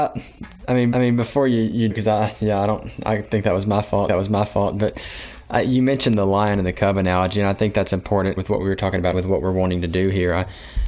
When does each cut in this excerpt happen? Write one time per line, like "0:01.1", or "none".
0:00.9
0:01.9
0:04.1
0:08.4
0:09.1